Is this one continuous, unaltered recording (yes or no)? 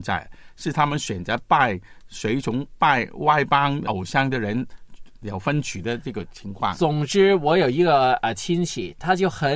no